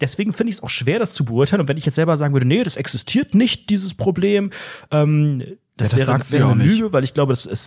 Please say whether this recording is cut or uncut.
uncut